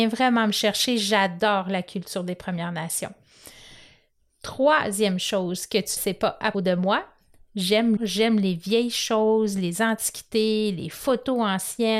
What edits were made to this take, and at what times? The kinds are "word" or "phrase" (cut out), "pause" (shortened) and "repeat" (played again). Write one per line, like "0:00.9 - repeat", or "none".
0:06.0 - word
0:06.5 - word
0:08.0 - word